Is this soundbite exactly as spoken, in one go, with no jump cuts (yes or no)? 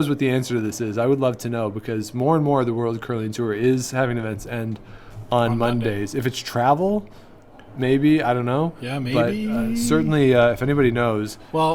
yes